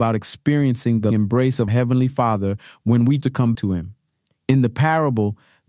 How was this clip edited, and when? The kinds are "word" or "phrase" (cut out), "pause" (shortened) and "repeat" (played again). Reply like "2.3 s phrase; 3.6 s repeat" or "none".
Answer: 1.1 s word; 1.7 s word; 3.2 s word; 3.5 s word